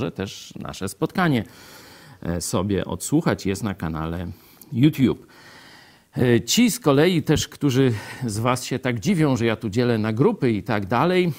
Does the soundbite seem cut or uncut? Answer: uncut